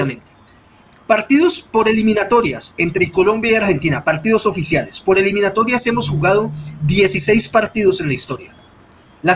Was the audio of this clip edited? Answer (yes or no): no